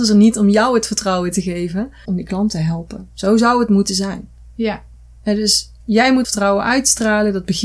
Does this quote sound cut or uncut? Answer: cut